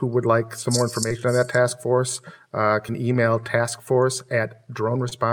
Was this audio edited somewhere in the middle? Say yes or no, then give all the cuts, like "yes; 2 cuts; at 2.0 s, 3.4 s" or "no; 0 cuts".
no; 0 cuts